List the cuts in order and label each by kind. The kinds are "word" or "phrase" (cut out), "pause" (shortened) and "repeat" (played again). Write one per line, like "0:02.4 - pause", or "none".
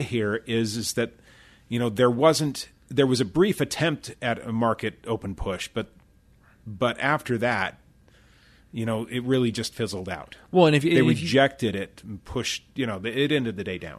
none